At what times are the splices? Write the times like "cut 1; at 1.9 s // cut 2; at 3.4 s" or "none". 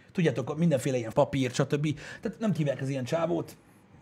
cut 1; at 1.1 s // cut 2; at 2.6 s